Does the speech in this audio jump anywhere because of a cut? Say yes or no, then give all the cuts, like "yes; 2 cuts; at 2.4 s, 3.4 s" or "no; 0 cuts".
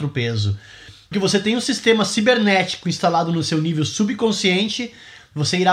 yes; 1 cut; at 1.1 s